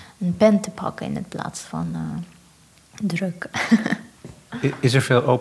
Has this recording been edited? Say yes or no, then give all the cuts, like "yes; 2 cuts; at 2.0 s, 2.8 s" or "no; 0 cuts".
no; 0 cuts